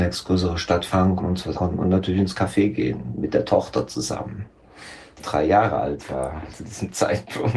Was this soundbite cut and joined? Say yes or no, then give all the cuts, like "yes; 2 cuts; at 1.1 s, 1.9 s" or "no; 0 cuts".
yes; 3 cuts; at 1.2 s, 1.5 s, 5.2 s